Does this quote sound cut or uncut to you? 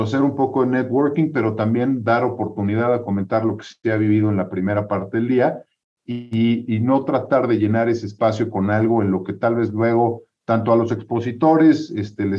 uncut